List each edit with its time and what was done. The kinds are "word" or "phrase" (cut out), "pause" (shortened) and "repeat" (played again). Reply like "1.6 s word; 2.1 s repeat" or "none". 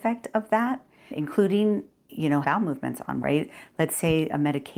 1.1 s word; 2.4 s word; 3.2 s word